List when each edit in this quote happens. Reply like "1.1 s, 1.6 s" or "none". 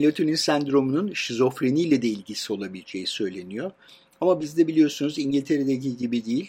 none